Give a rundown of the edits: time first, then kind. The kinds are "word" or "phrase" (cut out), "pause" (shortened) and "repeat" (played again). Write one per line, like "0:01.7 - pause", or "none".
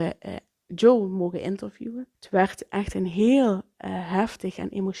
0:02.1 - pause